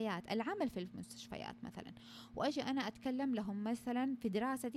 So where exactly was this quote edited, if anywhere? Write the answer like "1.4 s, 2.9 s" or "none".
none